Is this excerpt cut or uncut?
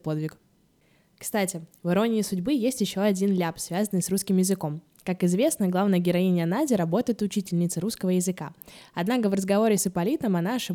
uncut